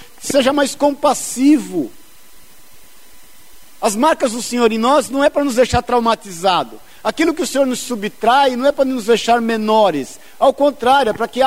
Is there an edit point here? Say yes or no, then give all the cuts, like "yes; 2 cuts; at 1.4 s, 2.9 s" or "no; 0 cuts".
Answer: no; 0 cuts